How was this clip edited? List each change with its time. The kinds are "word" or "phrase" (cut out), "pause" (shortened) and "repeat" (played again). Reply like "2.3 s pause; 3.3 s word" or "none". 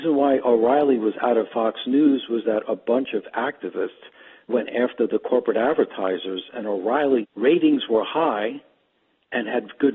4.5 s word; 7.2 s phrase